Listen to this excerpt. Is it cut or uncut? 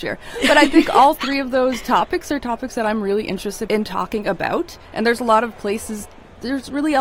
cut